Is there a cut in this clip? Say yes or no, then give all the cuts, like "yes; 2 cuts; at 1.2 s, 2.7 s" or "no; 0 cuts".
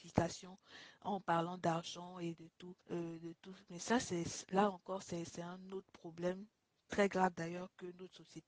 yes; 2 cuts; at 2.8 s, 6.7 s